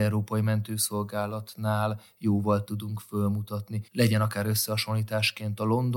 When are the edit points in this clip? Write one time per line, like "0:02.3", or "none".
0:02.6
0:03.9